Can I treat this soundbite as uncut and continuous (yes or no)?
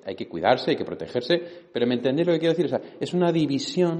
yes